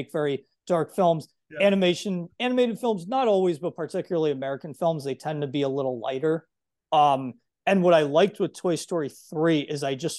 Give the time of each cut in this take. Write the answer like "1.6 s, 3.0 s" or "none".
none